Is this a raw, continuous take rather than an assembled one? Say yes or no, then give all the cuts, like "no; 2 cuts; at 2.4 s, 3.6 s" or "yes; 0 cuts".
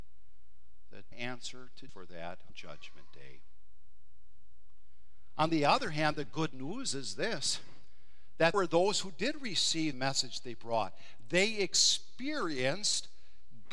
no; 5 cuts; at 1.1 s, 1.9 s, 2.5 s, 8.5 s, 9.9 s